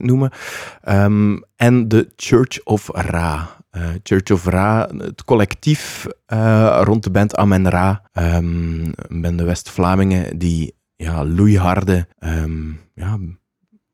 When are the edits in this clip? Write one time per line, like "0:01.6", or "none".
0:08.1
0:12.1

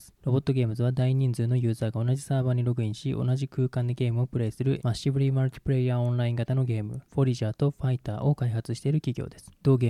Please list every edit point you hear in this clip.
0:04.8

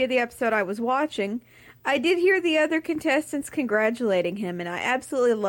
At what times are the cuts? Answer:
none

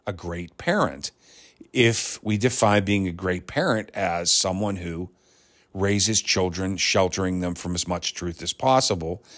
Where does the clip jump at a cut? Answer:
none

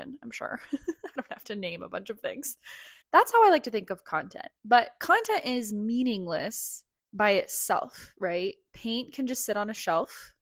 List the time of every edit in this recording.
0:03.0
0:04.6
0:07.0

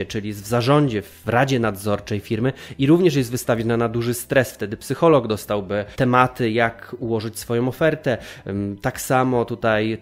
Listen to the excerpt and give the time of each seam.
none

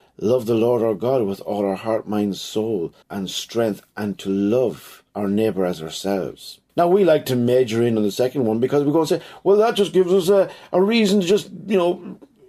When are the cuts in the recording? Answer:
0:03.0
0:05.1
0:06.7

